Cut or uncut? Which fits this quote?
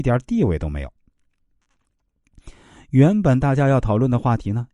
uncut